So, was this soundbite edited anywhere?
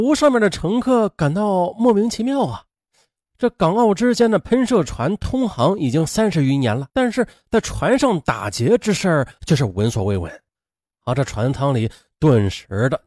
yes; 1 cut; at 6.9 s

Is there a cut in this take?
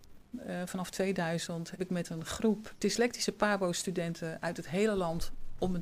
yes; 2 cuts; at 1.8 s, 2.8 s

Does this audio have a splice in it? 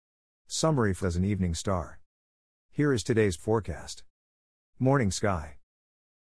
yes; 2 cuts; at 1.0 s, 3.4 s

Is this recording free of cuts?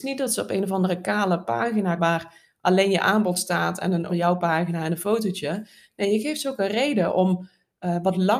no; 2 cuts; at 2.0 s, 4.1 s

